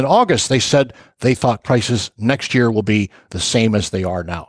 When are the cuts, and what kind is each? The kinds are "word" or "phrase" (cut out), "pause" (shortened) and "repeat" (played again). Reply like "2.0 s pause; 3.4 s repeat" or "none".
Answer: 1.6 s word